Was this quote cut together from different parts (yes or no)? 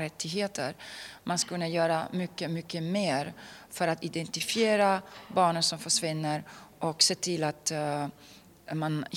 no